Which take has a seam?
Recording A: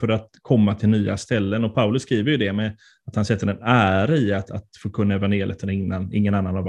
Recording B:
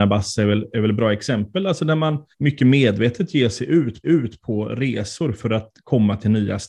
B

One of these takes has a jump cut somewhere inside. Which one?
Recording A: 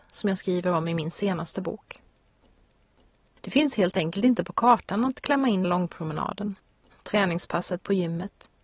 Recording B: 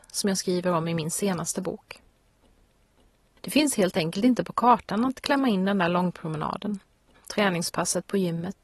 A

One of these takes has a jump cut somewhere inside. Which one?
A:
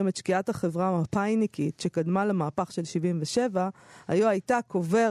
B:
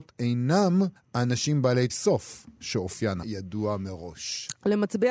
B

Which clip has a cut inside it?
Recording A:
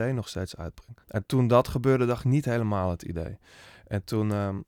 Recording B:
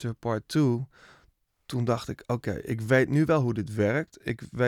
A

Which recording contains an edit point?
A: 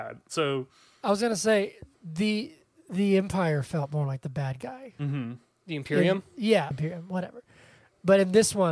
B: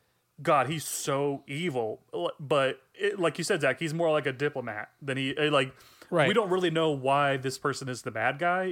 A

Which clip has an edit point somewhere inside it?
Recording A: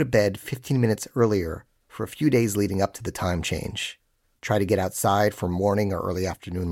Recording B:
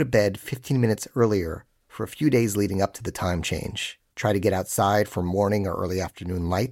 B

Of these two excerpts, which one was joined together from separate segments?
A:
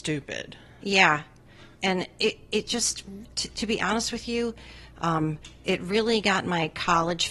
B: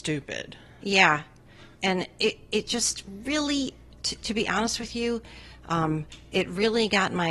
A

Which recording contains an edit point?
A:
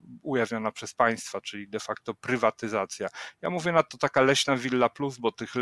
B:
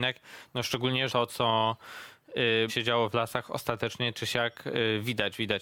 B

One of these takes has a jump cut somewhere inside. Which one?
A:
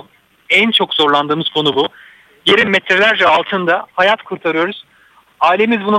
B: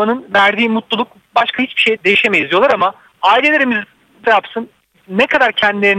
B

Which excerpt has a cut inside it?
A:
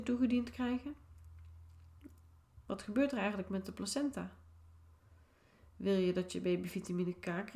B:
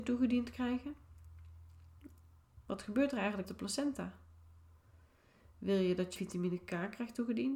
B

